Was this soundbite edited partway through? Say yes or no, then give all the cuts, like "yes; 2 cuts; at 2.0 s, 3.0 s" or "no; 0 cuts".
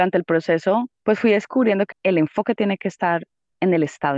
yes; 2 cuts; at 0.9 s, 1.9 s